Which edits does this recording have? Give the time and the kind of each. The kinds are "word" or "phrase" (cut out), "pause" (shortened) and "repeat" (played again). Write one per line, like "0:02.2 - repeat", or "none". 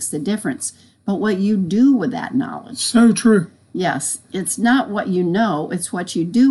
none